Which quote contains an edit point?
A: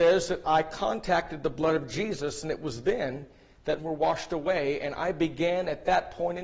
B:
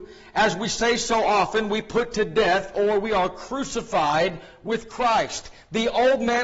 A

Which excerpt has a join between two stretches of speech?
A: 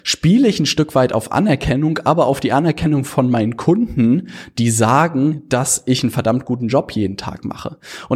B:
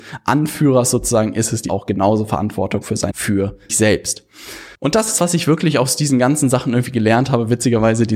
B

